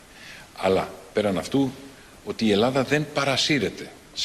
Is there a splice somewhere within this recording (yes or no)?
no